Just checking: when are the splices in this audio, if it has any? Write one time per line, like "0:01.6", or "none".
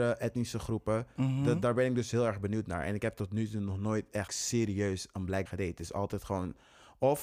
0:04.3
0:05.5